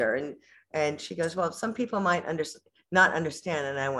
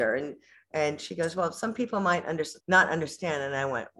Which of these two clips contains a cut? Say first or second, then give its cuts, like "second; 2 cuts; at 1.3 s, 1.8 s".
second; 1 cut; at 2.6 s